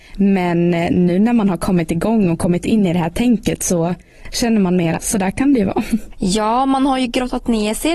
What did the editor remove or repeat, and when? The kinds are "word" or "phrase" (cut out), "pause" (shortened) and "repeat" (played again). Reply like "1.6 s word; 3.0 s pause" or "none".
5.0 s phrase